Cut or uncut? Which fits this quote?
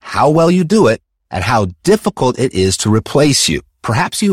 uncut